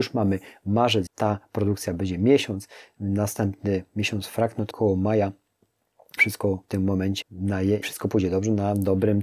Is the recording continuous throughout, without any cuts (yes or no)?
no